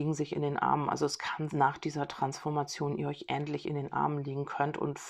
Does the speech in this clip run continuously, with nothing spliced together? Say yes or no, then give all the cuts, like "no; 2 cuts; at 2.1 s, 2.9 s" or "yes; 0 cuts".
no; 1 cut; at 1.5 s